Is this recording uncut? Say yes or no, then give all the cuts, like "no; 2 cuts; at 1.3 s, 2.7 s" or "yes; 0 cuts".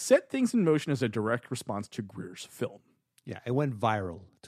yes; 0 cuts